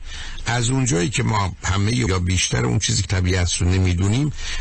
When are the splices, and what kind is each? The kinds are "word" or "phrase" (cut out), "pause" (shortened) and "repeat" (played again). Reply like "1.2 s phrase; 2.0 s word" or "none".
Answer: 2.1 s word; 3.0 s word